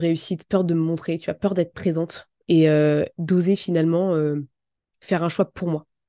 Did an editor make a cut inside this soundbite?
no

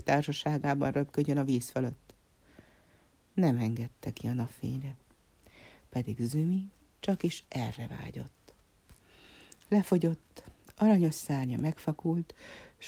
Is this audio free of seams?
yes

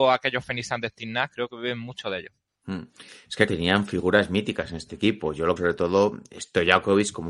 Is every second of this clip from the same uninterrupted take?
no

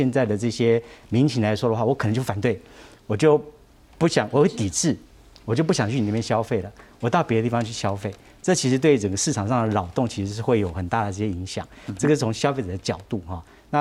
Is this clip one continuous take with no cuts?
yes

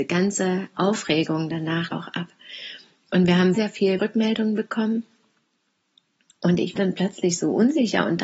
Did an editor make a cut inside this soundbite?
yes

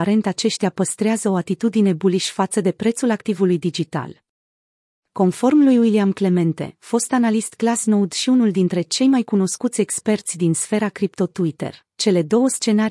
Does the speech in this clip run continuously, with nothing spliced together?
yes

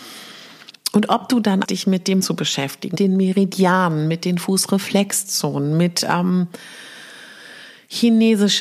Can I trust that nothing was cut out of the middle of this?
no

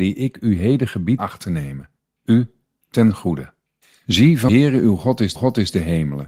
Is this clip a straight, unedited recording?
no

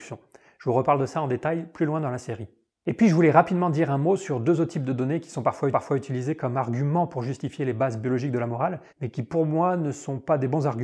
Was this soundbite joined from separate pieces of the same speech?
yes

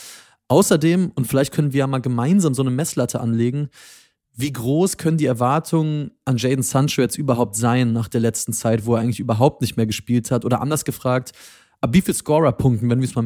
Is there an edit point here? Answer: no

